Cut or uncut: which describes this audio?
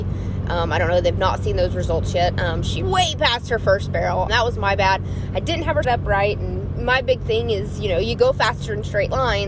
cut